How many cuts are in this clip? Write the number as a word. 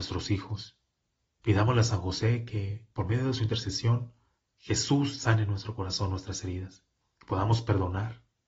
three